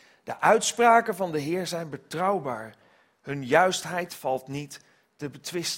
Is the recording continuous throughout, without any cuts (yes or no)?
yes